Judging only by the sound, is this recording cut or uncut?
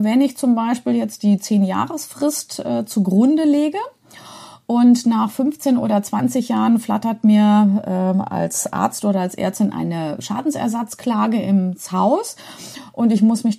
uncut